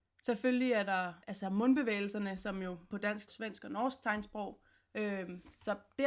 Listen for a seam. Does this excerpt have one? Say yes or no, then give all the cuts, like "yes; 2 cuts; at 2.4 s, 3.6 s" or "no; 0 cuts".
yes; 3 cuts; at 1.2 s, 2.9 s, 3.3 s